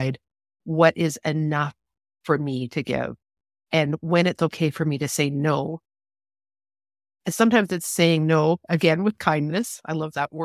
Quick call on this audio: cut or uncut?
uncut